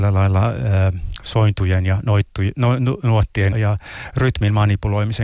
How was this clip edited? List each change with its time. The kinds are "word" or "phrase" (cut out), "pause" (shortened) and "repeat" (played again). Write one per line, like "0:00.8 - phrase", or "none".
0:03.5 - word